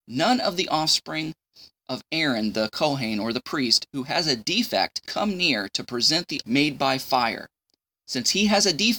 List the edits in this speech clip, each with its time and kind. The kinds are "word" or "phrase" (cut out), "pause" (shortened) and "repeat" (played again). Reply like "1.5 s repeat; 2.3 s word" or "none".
5.1 s word; 6.4 s phrase

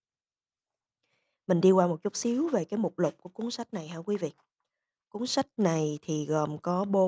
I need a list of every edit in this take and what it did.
none

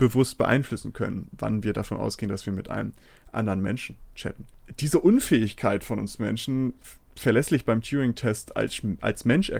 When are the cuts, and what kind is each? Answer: none

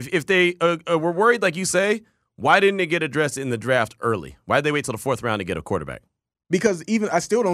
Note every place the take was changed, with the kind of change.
none

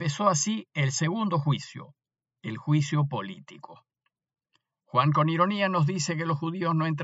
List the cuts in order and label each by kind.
none

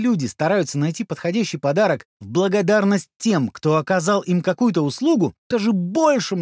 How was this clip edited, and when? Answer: 5.5 s word

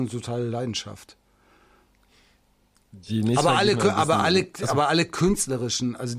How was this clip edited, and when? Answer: none

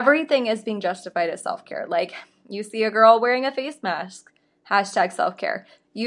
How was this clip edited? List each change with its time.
none

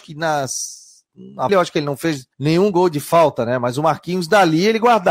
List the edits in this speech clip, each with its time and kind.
1.5 s phrase; 2.3 s pause

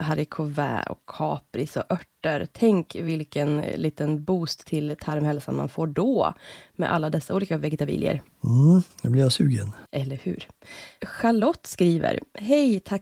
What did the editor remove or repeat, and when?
8.9 s pause; 9.9 s pause

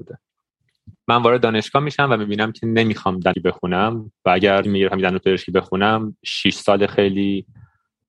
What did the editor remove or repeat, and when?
1.0 s pause; 3.3 s word; 4.6 s word

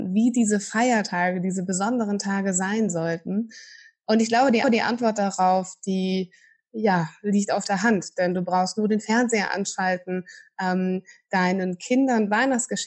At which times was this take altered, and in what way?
4.6 s repeat

